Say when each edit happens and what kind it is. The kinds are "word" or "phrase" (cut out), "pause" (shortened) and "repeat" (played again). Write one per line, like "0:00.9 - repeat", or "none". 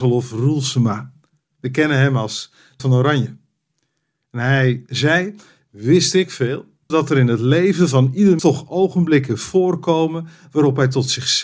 0:02.8 - word
0:06.9 - word
0:08.4 - word